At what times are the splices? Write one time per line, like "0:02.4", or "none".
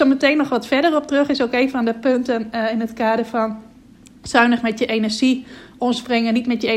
none